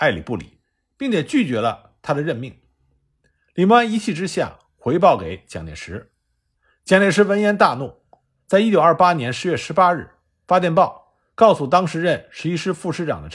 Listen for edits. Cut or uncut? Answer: uncut